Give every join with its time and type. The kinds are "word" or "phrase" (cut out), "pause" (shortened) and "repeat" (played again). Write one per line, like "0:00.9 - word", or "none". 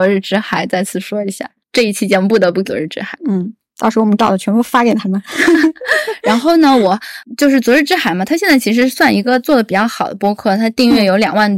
0:02.6 - word
0:04.2 - word